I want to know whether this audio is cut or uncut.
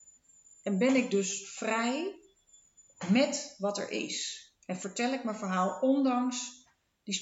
cut